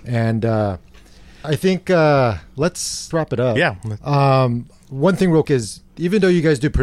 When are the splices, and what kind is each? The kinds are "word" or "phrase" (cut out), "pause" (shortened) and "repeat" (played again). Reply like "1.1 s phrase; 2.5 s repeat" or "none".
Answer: 1.4 s word; 3.1 s word; 5.4 s word